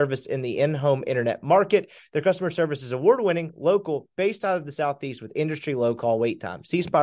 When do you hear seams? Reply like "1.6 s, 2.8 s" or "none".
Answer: none